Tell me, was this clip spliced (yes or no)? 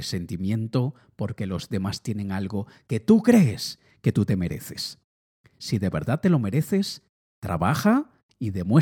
no